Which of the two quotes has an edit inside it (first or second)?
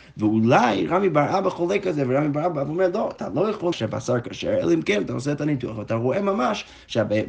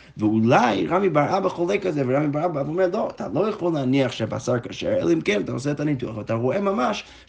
first